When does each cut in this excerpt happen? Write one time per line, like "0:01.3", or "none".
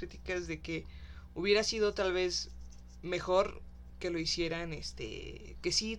none